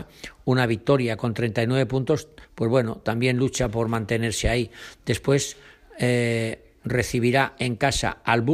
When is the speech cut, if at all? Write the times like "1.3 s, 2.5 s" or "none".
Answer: 2.4 s